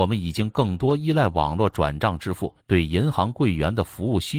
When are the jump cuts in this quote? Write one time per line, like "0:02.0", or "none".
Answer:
0:02.6